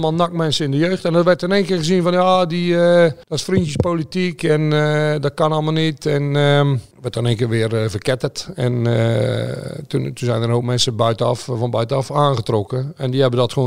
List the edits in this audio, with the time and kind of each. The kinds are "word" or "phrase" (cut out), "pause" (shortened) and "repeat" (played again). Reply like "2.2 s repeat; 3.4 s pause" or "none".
3.2 s pause; 6.9 s pause